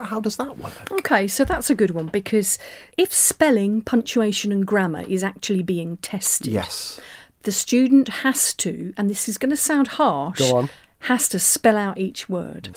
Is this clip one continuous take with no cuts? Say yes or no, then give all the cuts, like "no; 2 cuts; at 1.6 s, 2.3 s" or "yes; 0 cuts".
yes; 0 cuts